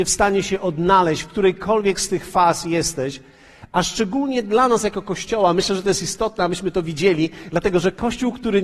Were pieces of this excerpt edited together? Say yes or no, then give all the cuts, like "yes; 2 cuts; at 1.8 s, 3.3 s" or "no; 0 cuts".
no; 0 cuts